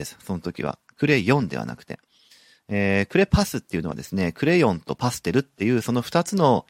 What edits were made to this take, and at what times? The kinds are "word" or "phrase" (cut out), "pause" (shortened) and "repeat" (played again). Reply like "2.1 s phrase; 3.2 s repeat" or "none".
none